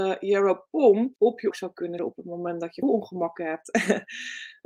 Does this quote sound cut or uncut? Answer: cut